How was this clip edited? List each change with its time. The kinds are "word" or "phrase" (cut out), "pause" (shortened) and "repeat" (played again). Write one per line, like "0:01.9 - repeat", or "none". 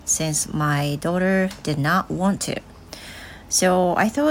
none